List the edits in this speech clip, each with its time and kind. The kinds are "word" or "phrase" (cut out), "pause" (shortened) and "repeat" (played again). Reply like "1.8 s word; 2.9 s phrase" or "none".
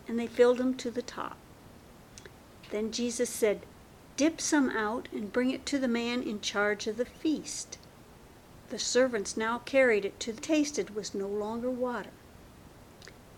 8.6 s pause; 10.4 s phrase